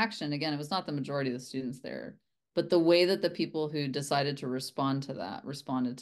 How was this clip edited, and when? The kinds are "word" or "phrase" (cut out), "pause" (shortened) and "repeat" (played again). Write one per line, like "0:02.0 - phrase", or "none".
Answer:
none